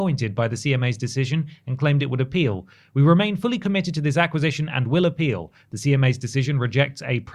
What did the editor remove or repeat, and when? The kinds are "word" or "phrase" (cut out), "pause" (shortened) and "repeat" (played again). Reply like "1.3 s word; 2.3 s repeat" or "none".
none

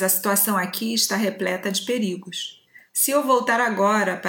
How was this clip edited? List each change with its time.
none

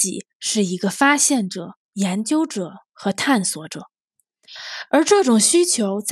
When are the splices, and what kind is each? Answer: 1.8 s pause

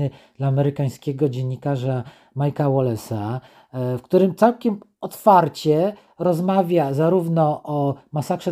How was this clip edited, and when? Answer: none

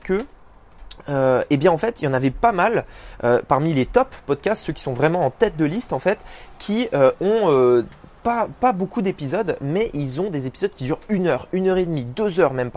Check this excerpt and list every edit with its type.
none

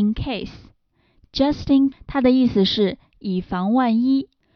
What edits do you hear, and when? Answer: 1.9 s word

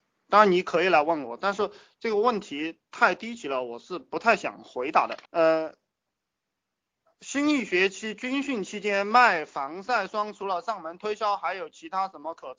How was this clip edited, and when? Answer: 5.2 s pause

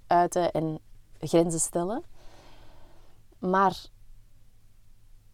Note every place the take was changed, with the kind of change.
none

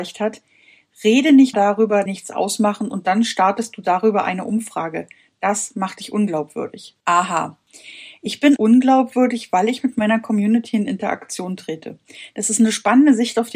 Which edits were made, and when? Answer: 1.5 s word; 2.1 s phrase; 7.0 s pause; 8.6 s word

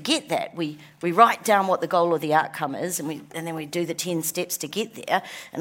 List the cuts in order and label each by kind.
none

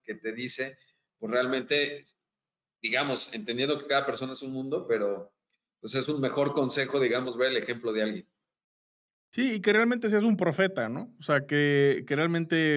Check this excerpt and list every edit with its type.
none

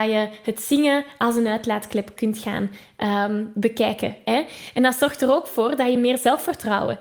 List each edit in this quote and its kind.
none

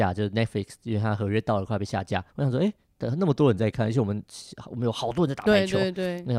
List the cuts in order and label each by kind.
2.3 s pause

